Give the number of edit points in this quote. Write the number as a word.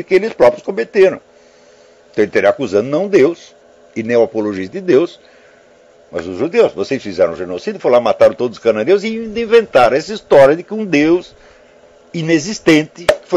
zero